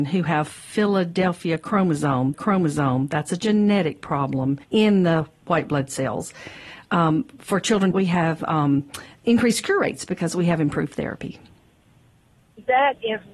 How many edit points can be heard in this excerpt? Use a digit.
3